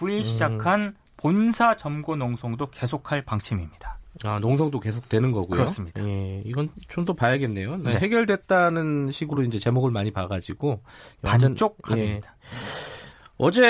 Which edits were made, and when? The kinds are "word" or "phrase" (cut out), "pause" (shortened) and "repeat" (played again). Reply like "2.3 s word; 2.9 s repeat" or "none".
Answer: none